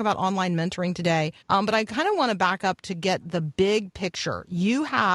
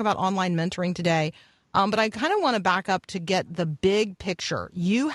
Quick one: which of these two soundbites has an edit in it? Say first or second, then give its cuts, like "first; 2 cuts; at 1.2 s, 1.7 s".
first; 1 cut; at 1.4 s